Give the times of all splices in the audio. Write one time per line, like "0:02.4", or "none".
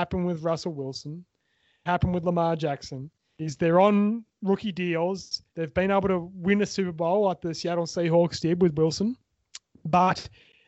0:01.9
0:05.5